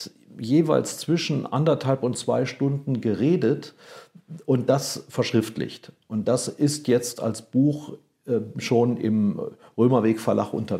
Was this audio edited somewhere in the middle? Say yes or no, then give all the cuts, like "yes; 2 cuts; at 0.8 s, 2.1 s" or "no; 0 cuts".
no; 0 cuts